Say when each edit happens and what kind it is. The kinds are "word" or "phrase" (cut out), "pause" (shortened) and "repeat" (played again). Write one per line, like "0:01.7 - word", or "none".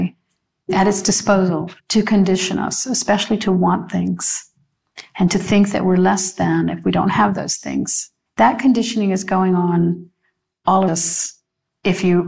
0:01.8 - pause
0:08.3 - pause
0:10.9 - word